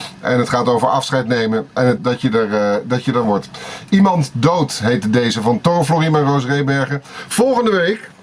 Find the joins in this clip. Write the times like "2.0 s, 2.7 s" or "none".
2.0 s, 3.2 s